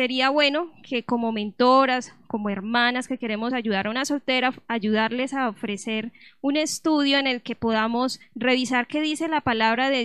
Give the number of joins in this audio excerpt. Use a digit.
0